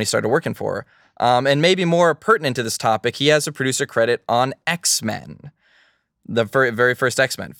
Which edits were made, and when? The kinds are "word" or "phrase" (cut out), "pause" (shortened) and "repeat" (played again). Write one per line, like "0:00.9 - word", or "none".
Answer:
none